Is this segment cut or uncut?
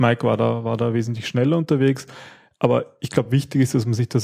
uncut